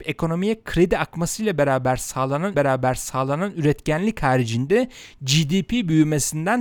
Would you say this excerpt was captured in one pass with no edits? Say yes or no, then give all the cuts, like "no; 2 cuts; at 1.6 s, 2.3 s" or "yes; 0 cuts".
no; 1 cut; at 2.5 s